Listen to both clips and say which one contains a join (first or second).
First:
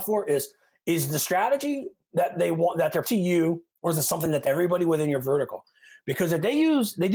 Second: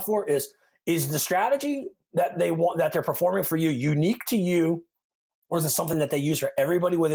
first